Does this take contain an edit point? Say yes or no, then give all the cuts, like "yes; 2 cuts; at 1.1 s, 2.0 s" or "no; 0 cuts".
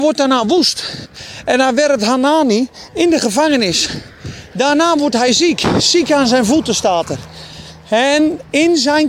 no; 0 cuts